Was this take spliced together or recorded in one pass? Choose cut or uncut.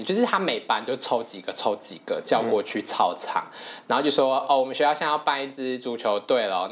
uncut